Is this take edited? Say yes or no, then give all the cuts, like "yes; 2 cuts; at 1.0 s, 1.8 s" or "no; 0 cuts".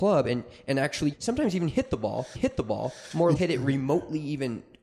yes; 3 cuts; at 1.1 s, 2.3 s, 3.3 s